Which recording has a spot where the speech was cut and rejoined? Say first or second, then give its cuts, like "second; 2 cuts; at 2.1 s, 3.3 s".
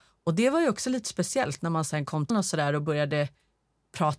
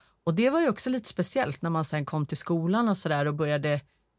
first; 1 cut; at 2.3 s